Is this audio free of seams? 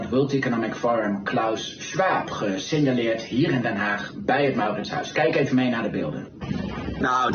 yes; 0 cuts

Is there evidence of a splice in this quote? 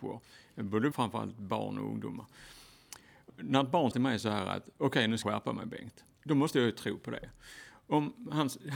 yes; 5 cuts; at 0.9 s, 3.3 s, 3.9 s, 5.2 s, 6.1 s

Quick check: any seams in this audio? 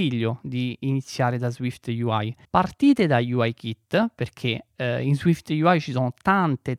yes; 1 cut; at 2.4 s

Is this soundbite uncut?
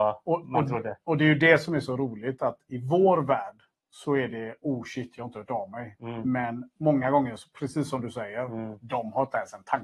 yes; 0 cuts

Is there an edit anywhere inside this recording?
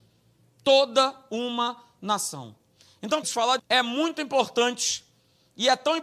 yes; 2 cuts; at 3.2 s, 3.6 s

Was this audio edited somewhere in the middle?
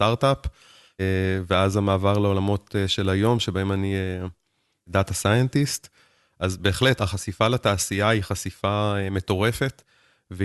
no; 0 cuts

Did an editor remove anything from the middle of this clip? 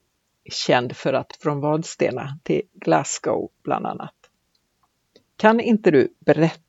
yes; 1 cut; at 1.3 s

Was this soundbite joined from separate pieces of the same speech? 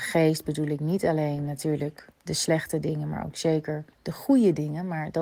yes; 2 cuts; at 2.1 s, 3.9 s

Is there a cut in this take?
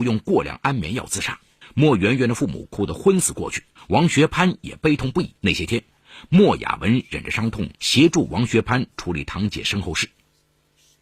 yes; 4 cuts; at 1.6 s, 3.8 s, 5.4 s, 7.7 s

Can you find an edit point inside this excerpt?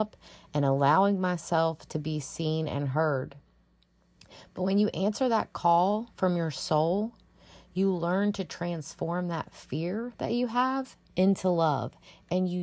yes; 1 cut; at 11.0 s

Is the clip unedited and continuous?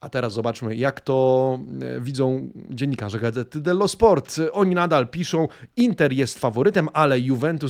yes; 0 cuts

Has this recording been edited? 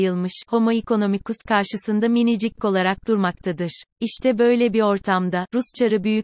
yes; 2 cuts; at 2.6 s, 3.9 s

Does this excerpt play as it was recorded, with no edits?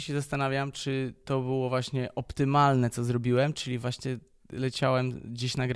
yes; 0 cuts

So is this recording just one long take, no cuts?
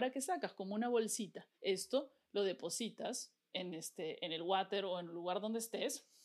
no; 2 cuts; at 1.5 s, 3.5 s

